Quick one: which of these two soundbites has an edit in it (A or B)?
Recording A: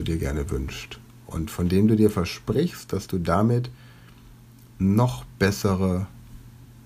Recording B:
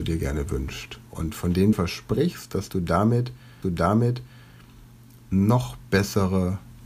B